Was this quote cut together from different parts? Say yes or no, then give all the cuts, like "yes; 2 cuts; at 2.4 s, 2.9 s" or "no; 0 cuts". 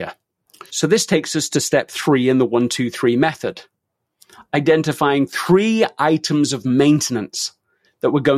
no; 0 cuts